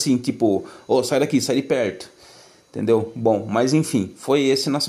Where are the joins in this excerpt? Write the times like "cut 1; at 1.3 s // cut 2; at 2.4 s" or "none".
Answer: none